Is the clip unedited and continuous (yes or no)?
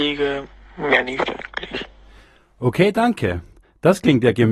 yes